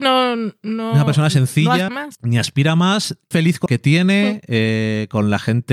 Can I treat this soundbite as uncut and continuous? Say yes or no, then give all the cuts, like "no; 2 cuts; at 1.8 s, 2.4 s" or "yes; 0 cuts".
no; 3 cuts; at 1.9 s, 3.3 s, 3.7 s